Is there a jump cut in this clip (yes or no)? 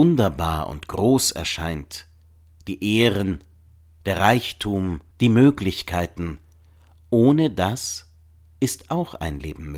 yes